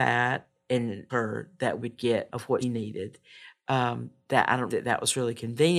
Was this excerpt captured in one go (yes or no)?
no